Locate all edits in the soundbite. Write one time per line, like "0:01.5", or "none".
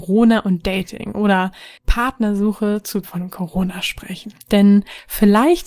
0:01.8
0:03.0
0:04.4